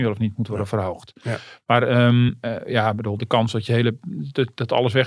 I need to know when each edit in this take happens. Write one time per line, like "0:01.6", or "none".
none

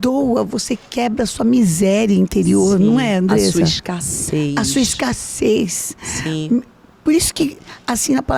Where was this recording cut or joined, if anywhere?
none

